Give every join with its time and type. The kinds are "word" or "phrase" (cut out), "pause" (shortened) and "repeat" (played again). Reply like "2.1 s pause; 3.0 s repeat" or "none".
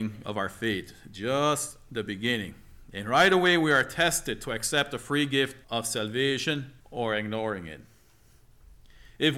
5.6 s pause; 6.8 s pause